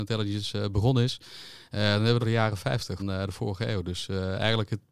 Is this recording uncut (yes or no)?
no